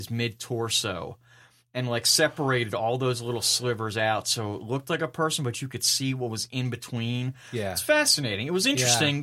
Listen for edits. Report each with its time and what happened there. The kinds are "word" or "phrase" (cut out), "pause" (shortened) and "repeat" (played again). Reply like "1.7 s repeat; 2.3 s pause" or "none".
none